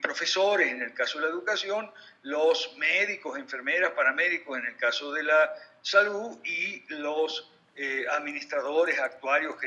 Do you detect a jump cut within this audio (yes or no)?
no